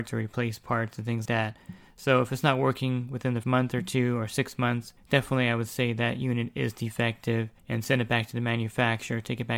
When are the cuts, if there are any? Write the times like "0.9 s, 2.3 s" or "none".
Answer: 1.3 s, 3.4 s, 5.0 s, 7.6 s